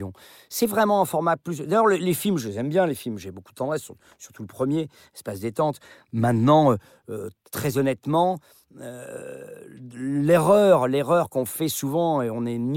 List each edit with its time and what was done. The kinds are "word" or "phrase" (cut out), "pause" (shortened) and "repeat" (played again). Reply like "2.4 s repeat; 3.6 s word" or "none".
none